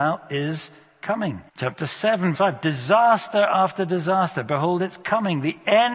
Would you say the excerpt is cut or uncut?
cut